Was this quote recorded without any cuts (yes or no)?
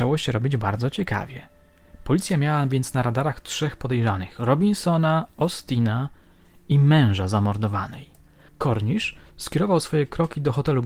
yes